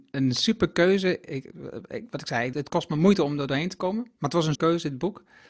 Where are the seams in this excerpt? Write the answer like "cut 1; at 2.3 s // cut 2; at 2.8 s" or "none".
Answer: cut 1; at 2.5 s // cut 2; at 4.5 s